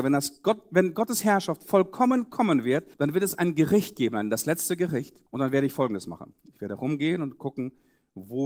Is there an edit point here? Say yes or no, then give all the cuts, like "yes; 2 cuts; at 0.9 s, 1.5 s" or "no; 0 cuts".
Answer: yes; 2 cuts; at 2.9 s, 5.3 s